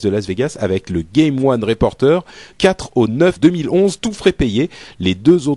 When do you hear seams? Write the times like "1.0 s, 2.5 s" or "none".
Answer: 2.5 s, 3.4 s